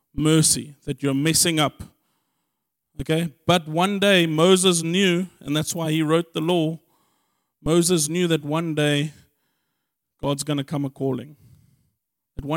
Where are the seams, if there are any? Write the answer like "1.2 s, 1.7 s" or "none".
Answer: none